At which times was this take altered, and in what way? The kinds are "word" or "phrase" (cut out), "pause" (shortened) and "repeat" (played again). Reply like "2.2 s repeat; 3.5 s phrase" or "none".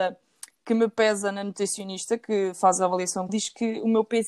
3.3 s word